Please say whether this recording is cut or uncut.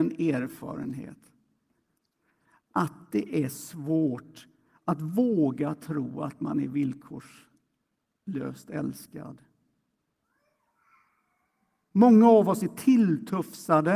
uncut